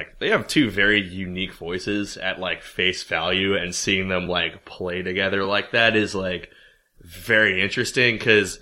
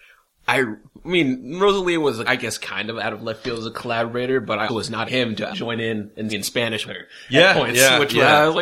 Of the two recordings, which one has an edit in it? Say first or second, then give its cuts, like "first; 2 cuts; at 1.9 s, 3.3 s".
second; 6 cuts; at 2.3 s, 4.7 s, 5.1 s, 5.5 s, 6.3 s, 6.9 s